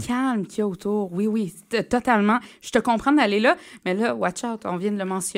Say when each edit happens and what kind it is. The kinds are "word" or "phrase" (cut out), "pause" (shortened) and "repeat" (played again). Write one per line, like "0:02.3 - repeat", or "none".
none